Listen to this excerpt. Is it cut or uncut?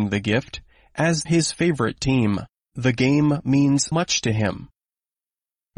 cut